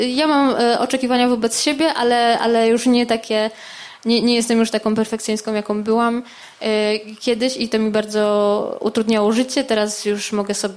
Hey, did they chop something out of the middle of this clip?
no; 0 cuts

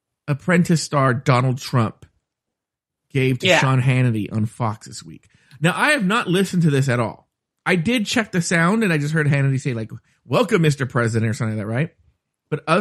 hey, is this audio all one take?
yes; 0 cuts

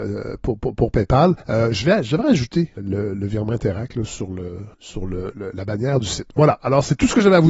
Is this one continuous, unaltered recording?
no; 4 cuts; at 1.4 s, 2.8 s, 3.1 s, 4.7 s

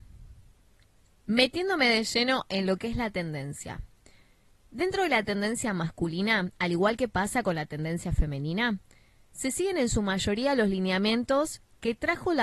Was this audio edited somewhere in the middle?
no; 0 cuts

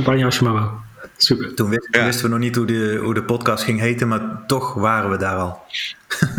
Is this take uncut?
yes; 0 cuts

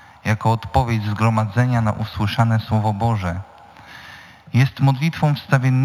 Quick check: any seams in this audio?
no; 0 cuts

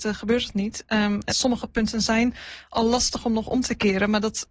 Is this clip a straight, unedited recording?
no; 1 cut; at 1.3 s

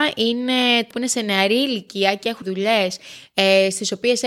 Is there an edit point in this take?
yes; 2 cuts; at 0.9 s, 2.4 s

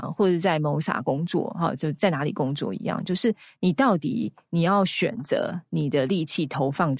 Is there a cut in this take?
no; 0 cuts

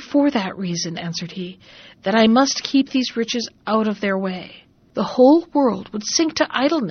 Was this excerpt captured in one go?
yes; 0 cuts

